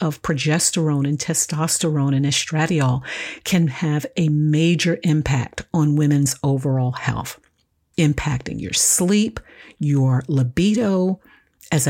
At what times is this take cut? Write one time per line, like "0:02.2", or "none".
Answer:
none